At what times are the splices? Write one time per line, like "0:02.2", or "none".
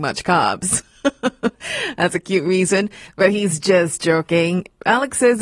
none